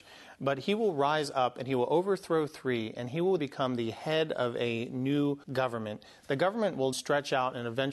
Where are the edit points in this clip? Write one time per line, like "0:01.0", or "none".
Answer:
0:03.4
0:05.4
0:06.9